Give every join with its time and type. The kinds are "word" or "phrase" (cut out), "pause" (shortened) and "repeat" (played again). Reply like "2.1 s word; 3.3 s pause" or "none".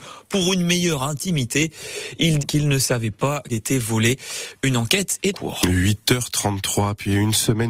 2.4 s word; 3.5 s word; 5.3 s word